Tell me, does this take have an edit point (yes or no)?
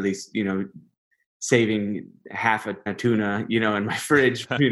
yes